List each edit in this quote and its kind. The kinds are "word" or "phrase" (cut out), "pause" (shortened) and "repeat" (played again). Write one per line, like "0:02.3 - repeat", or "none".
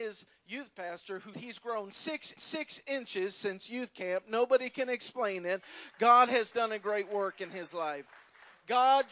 0:01.3 - word
0:02.4 - repeat